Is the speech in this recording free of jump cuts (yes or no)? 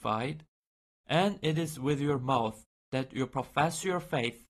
yes